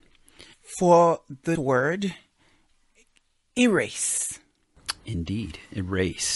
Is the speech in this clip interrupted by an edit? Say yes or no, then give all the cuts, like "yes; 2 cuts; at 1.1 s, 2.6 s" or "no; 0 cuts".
yes; 1 cut; at 1.6 s